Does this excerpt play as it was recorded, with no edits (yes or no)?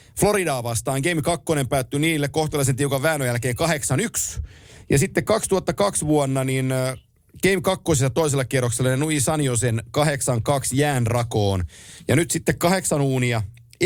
yes